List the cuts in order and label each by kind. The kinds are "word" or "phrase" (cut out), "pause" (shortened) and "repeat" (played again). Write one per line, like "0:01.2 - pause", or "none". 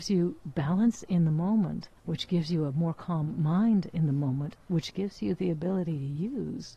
0:02.0 - pause

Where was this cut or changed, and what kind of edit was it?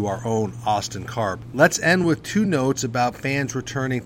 none

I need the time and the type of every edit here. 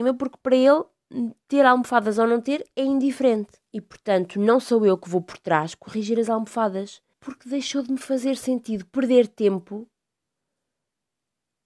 0:03.7 - pause
0:07.1 - pause

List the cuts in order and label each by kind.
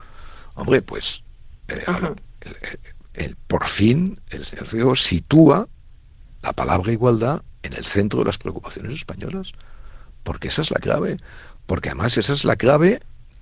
none

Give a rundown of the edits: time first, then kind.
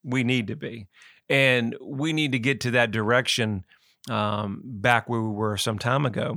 none

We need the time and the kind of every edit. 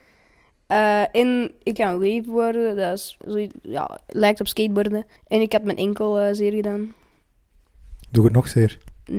0:01.8 - word
0:03.2 - word
0:05.2 - pause

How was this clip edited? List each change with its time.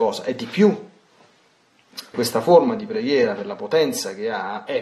0:02.1 - word

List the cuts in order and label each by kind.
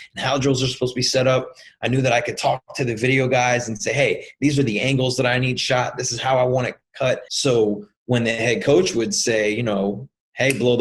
0:07.3 - pause

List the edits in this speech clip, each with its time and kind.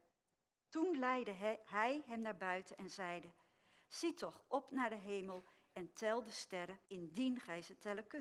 0:06.8 - pause

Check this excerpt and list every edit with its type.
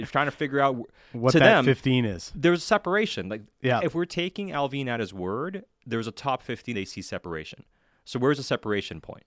0:06.7 - phrase

